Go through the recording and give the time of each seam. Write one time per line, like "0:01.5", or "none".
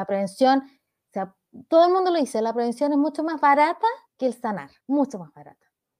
0:04.1
0:04.8